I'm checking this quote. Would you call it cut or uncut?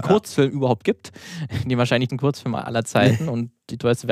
cut